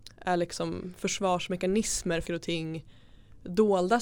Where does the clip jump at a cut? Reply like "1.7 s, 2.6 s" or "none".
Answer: 2.3 s